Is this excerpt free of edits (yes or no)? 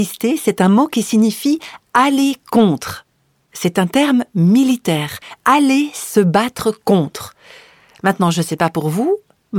yes